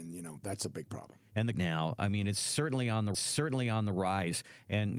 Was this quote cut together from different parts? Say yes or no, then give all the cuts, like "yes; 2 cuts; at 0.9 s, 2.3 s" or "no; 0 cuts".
yes; 2 cuts; at 1.5 s, 3.1 s